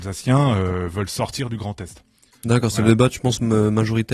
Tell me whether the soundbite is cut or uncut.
cut